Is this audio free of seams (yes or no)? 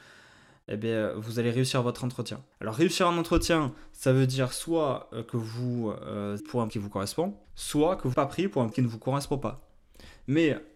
no